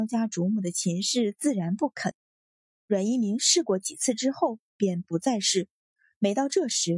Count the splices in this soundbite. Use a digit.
0